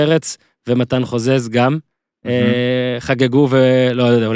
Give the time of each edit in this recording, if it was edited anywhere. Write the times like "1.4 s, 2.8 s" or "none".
none